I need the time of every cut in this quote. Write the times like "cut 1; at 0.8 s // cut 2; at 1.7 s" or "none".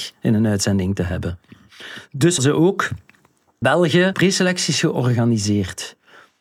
cut 1; at 2.4 s // cut 2; at 3.6 s // cut 3; at 4.1 s

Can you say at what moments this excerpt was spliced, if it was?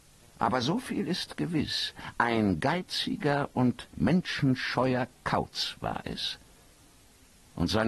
none

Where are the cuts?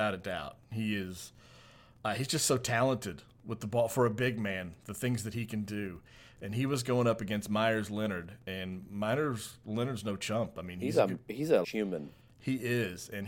cut 1; at 11.6 s

